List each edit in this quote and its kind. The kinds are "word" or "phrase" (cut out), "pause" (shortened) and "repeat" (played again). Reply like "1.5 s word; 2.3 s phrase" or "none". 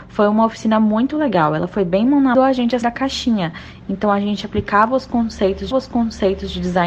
2.3 s phrase; 2.8 s word; 5.7 s repeat